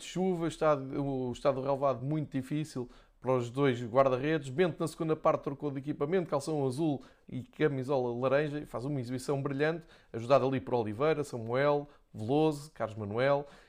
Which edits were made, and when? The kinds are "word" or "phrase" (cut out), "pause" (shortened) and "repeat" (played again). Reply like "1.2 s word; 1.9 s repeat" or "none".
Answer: none